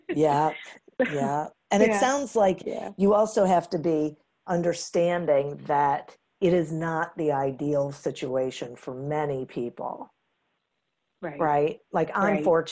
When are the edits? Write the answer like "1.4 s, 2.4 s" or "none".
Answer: none